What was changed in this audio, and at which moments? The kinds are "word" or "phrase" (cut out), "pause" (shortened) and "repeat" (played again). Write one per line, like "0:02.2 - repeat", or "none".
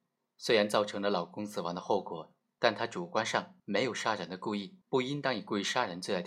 0:03.6 - pause
0:04.8 - pause